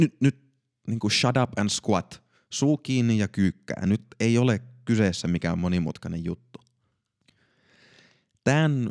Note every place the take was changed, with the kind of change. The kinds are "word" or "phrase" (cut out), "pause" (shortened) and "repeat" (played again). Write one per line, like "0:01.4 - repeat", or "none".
none